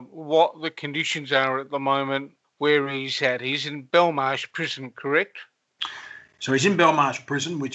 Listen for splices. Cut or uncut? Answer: cut